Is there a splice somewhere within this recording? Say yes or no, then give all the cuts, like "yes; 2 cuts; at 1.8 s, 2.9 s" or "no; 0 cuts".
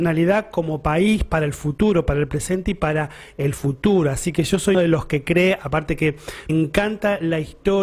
yes; 2 cuts; at 4.7 s, 6.5 s